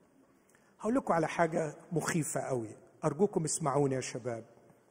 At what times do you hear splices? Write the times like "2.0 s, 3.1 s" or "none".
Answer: none